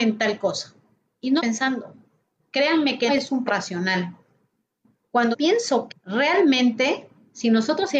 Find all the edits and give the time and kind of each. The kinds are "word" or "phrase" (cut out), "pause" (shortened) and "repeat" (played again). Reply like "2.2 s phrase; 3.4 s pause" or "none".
1.4 s phrase; 3.1 s word; 3.5 s word; 5.3 s word; 5.9 s word